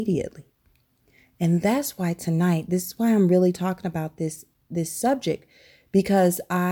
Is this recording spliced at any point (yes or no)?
no